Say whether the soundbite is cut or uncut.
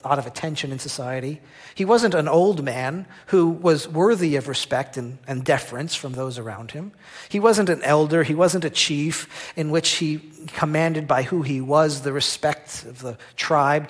uncut